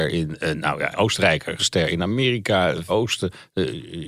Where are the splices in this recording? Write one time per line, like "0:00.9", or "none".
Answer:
0:00.9
0:01.6
0:02.9